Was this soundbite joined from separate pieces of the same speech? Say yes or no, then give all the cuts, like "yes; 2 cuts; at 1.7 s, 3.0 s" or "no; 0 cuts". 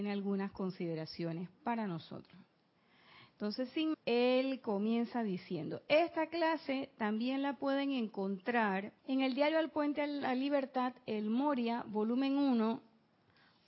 yes; 2 cuts; at 3.9 s, 9.0 s